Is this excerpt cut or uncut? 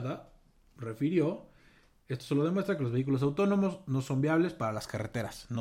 uncut